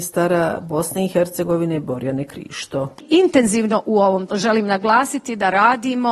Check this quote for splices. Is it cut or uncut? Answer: cut